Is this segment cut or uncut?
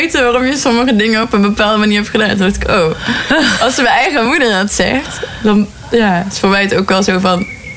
uncut